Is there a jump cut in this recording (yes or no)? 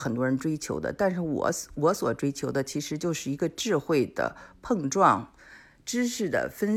no